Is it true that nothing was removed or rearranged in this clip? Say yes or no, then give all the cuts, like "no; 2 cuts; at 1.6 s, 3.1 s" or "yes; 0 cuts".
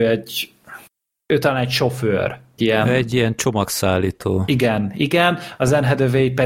no; 1 cut; at 2.6 s